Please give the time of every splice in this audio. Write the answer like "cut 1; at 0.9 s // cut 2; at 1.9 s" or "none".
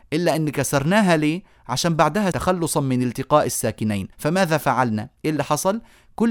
cut 1; at 2.3 s // cut 2; at 4.1 s